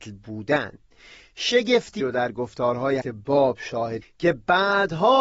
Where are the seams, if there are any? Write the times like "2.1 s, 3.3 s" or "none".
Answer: 2.0 s, 3.0 s, 4.0 s